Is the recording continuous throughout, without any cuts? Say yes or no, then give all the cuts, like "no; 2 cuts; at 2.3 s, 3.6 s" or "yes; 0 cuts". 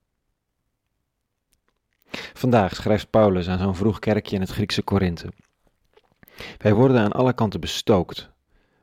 yes; 0 cuts